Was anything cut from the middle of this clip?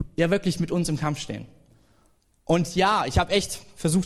no; 0 cuts

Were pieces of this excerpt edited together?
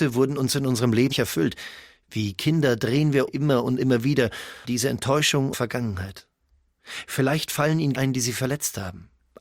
yes; 5 cuts; at 1.1 s, 3.3 s, 4.6 s, 5.5 s, 7.9 s

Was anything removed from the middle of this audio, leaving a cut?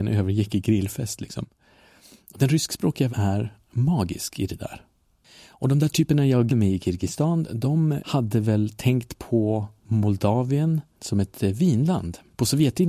yes; 2 cuts; at 3.1 s, 6.5 s

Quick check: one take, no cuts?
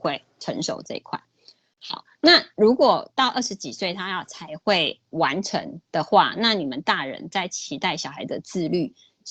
yes; 0 cuts

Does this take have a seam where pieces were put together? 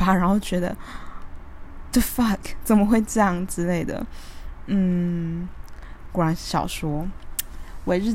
yes; 1 cut; at 1.9 s

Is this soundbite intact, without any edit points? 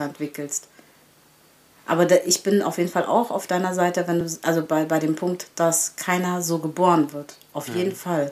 yes; 0 cuts

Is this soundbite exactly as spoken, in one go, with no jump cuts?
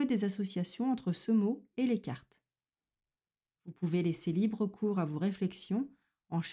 yes; 0 cuts

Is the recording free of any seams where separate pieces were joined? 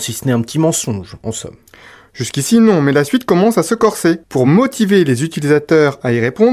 yes; 0 cuts

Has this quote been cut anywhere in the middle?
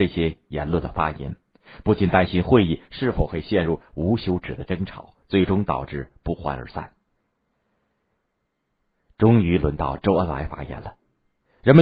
yes; 1 cut; at 5.2 s

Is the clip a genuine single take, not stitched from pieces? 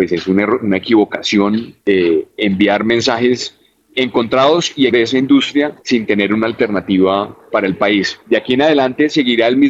no; 5 cuts; at 1.8 s, 3.9 s, 4.9 s, 5.8 s, 7.5 s

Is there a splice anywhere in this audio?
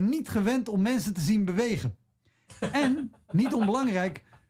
no; 0 cuts

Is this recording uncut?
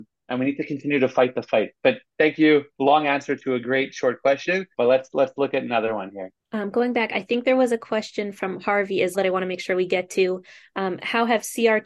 no; 2 cuts; at 4.7 s, 9.1 s

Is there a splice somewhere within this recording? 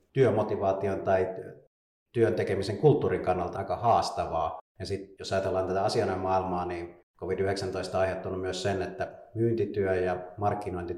yes; 3 cuts; at 3.5 s, 4.7 s, 7.1 s

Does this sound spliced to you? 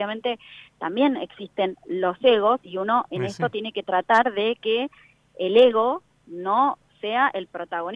no; 0 cuts

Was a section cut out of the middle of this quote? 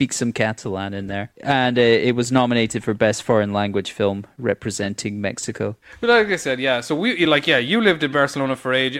no; 0 cuts

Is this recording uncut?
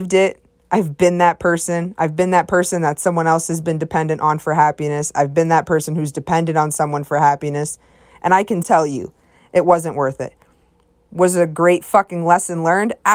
no; 1 cut; at 8.6 s

